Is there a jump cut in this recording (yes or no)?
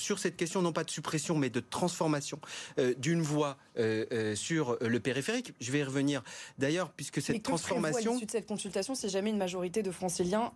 no